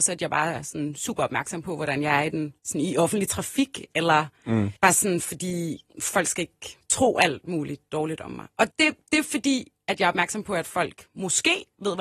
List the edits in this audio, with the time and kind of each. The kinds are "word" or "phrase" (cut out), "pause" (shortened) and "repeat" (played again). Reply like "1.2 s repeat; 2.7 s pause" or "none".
4.8 s pause; 5.9 s pause; 8.7 s word